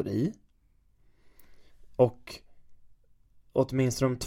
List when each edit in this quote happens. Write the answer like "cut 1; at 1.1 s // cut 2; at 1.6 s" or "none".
none